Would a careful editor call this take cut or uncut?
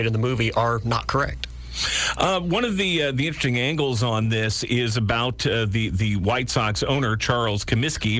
uncut